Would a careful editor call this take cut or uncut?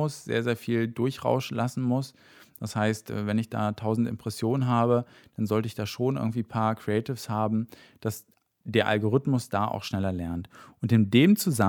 uncut